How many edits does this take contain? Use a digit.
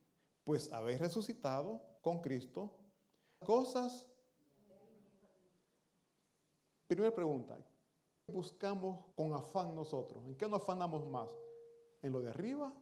4